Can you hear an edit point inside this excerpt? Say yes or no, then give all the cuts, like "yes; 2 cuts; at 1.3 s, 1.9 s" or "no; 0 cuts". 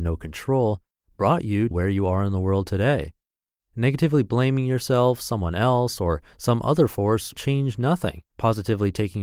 yes; 3 cuts; at 1.7 s, 7.3 s, 8.3 s